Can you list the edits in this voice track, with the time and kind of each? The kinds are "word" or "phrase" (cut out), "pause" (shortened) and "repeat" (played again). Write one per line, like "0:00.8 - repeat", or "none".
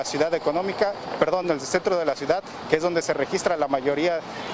none